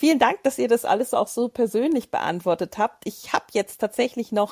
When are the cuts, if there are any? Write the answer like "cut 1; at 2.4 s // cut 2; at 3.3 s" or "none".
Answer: none

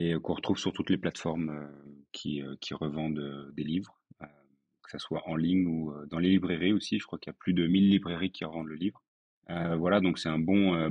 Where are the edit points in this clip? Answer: cut 1; at 9.3 s

